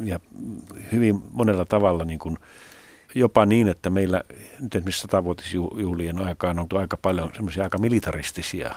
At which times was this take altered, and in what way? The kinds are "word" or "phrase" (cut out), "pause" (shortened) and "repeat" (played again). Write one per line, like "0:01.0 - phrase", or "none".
0:03.1 - word
0:06.7 - word

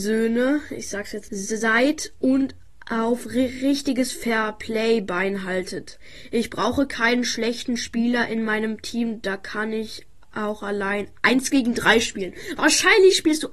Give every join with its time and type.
0:01.3 - word

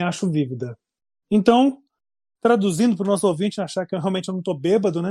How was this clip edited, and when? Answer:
none

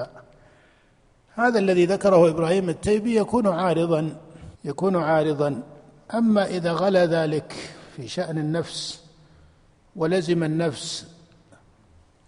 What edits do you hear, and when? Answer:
0:04.5 - pause

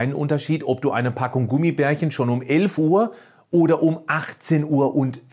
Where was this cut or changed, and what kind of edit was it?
none

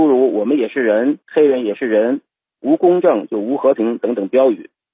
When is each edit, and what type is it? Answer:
0:01.2 - pause

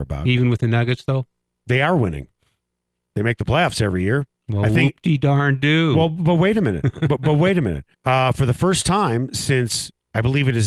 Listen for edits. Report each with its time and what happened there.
0:07.9 - pause

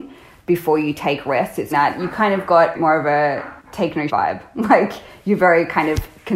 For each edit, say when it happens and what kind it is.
0:01.7 - phrase
0:02.7 - phrase
0:03.6 - pause
0:04.1 - word

